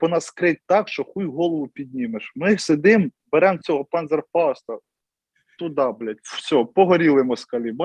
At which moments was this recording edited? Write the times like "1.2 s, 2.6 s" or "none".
3.2 s